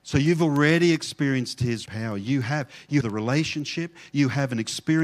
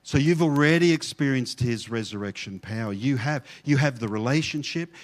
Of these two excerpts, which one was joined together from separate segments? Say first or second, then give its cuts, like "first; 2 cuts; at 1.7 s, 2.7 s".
first; 2 cuts; at 1.9 s, 3.0 s